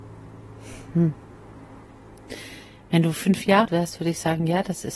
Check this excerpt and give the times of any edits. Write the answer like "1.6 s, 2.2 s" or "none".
3.7 s

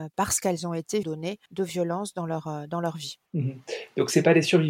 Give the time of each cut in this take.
1.0 s, 1.5 s, 3.3 s

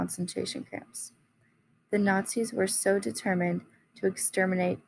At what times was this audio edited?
none

